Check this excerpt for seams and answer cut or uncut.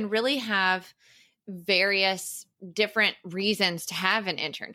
uncut